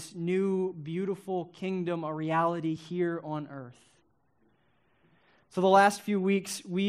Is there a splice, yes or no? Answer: no